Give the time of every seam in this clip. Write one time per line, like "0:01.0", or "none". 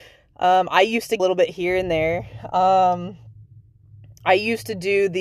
0:01.2